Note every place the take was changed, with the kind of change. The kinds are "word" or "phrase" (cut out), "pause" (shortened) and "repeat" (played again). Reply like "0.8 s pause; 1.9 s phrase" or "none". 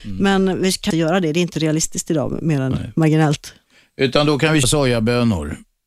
0.9 s word; 4.6 s word